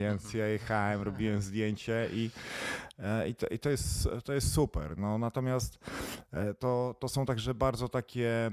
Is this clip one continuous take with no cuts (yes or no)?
yes